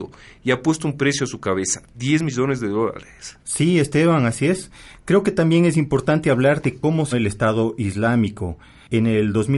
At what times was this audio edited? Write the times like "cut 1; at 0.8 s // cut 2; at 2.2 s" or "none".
cut 1; at 7.1 s